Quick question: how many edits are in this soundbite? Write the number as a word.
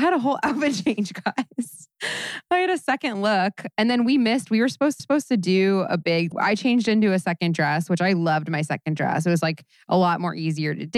three